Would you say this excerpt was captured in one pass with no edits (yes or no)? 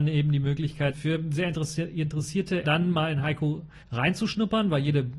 no